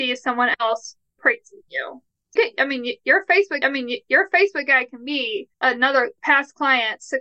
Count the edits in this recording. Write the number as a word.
three